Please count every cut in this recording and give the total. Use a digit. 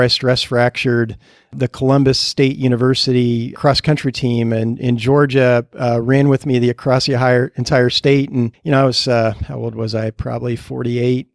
0